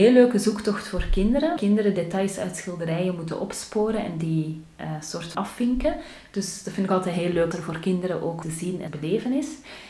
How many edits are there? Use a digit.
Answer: 6